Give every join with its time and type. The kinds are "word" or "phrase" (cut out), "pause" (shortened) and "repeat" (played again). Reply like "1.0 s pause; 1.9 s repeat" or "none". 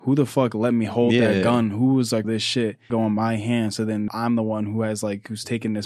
2.2 s phrase; 2.9 s phrase; 4.1 s word